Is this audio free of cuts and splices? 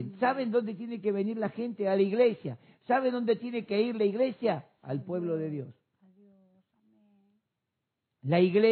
yes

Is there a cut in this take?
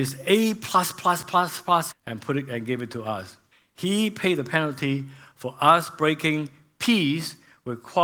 yes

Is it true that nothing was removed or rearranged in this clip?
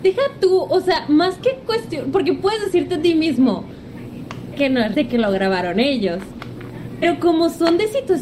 no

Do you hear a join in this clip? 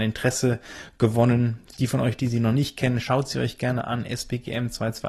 no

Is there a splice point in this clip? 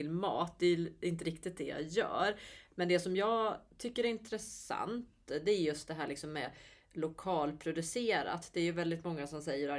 no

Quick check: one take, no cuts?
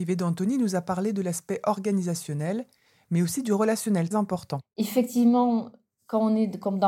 no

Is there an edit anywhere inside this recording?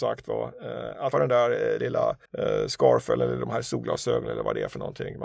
yes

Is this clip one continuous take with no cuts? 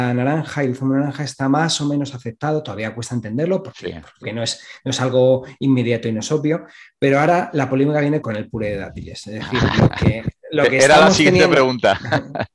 no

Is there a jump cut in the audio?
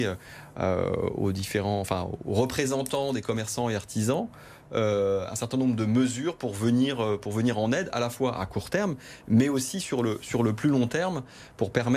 no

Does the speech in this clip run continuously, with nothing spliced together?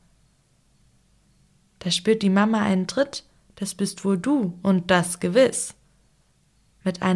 yes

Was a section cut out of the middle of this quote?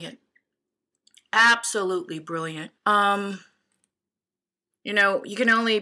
yes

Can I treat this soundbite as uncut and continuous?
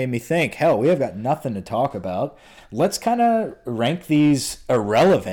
yes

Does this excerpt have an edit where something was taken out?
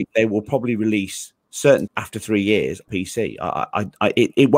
yes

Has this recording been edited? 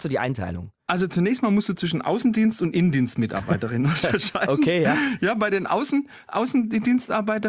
no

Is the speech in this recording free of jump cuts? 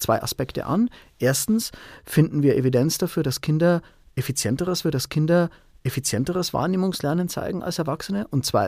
no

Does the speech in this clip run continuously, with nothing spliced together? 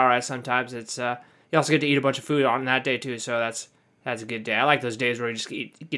yes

